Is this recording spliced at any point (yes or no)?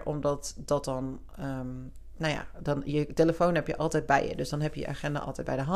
no